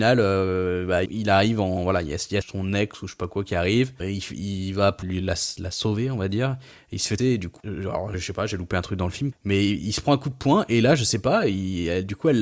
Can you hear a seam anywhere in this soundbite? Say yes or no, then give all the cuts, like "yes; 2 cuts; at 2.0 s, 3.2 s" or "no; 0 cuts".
yes; 8 cuts; at 1.1 s, 2.4 s, 4.0 s, 5.0 s, 7.2 s, 7.6 s, 8.1 s, 9.3 s